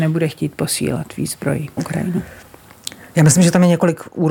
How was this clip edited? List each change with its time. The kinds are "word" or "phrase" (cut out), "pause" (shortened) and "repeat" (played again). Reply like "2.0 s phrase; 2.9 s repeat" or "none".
1.8 s word

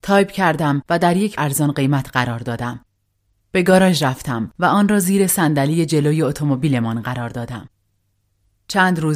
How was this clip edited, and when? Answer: 1.4 s word

